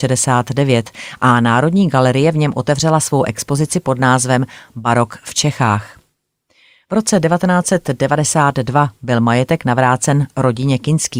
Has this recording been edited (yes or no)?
no